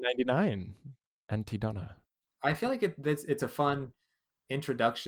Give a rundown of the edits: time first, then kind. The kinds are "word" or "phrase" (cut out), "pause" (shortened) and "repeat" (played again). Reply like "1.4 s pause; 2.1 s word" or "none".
none